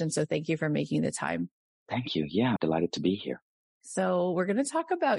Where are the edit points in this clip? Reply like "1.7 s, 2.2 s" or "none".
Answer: 2.6 s